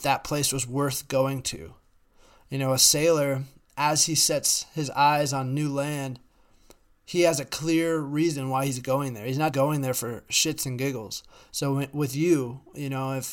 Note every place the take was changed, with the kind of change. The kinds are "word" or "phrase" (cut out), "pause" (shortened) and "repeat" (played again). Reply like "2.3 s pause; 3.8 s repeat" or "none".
9.5 s word